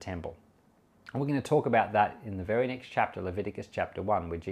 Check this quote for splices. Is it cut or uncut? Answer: uncut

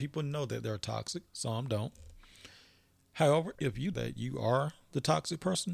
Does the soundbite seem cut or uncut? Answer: cut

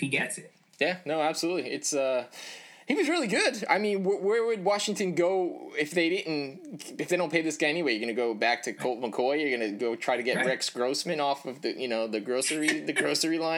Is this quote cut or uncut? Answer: uncut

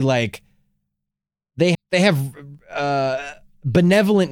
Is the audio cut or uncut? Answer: cut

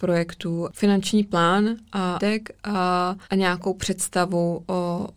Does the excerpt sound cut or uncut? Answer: cut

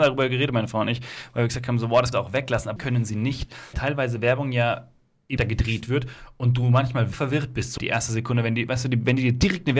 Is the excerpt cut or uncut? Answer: cut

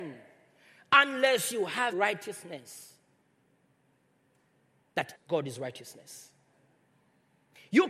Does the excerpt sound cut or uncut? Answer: cut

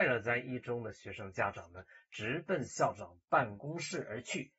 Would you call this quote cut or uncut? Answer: uncut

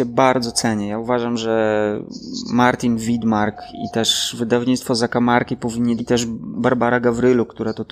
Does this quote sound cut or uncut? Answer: cut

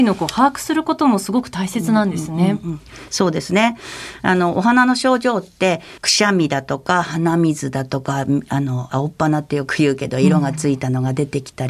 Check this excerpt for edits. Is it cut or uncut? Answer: cut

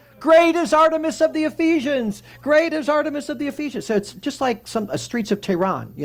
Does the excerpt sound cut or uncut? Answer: uncut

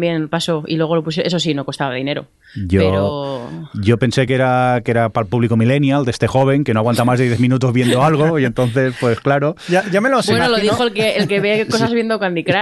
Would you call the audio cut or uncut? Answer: uncut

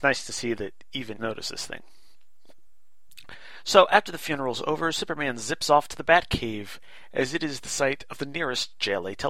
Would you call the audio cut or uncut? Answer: cut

